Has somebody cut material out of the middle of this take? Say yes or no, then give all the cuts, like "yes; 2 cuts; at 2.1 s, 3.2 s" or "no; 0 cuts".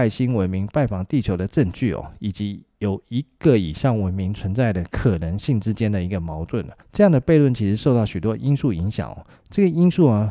yes; 1 cut; at 6.8 s